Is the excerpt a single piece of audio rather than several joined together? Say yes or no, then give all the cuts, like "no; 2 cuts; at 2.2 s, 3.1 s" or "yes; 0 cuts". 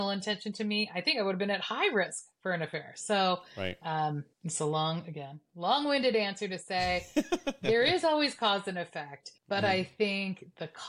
no; 2 cuts; at 4.3 s, 9.4 s